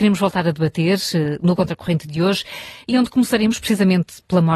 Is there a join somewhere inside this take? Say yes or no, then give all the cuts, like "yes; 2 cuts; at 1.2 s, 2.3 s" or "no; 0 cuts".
no; 0 cuts